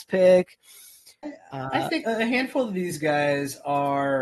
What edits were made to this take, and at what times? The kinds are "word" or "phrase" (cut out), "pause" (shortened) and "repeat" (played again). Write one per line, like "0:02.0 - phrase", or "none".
0:02.0 - word